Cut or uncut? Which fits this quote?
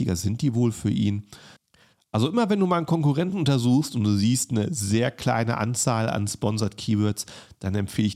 uncut